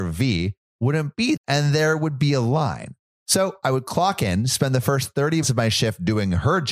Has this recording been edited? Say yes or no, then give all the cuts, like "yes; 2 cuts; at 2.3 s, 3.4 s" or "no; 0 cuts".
yes; 2 cuts; at 1.4 s, 5.4 s